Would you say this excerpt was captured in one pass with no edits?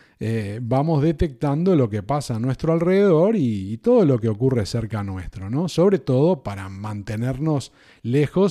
yes; 0 cuts

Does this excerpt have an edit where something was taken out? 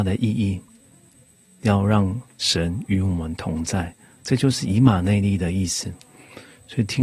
no; 0 cuts

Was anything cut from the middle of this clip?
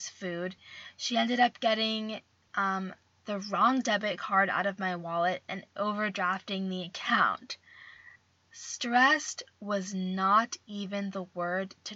no; 0 cuts

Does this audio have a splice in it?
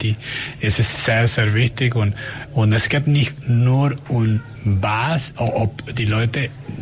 no; 0 cuts

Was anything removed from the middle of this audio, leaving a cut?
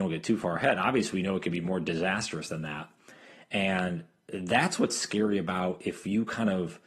no; 0 cuts

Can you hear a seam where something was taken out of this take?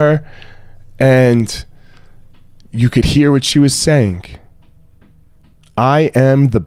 no; 0 cuts

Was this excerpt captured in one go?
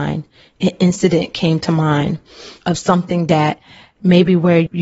yes; 0 cuts

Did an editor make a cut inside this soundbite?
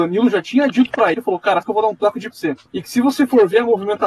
yes; 4 cuts; at 1.1 s, 1.6 s, 2.3 s, 2.7 s

